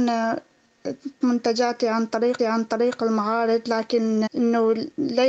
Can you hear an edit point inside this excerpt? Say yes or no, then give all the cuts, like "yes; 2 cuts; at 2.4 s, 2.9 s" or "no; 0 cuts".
yes; 3 cuts; at 1.2 s, 2.4 s, 4.3 s